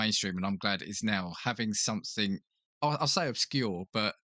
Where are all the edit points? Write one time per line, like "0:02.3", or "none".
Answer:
none